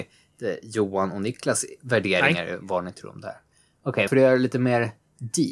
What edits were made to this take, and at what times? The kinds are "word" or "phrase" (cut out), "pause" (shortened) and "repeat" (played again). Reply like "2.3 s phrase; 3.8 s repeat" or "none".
4.1 s word